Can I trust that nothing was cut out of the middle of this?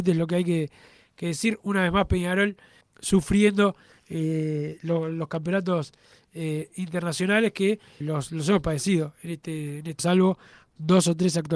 no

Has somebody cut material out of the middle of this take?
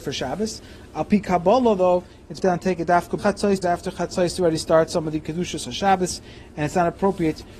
yes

